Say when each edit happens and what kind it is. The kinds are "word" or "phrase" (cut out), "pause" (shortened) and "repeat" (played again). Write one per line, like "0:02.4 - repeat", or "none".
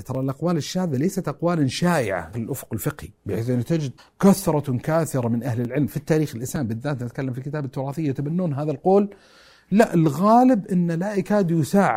0:02.3 - word
0:03.2 - pause
0:04.0 - pause